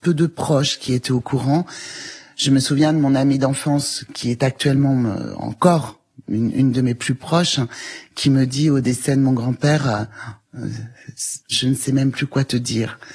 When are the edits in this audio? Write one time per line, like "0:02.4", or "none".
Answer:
0:11.4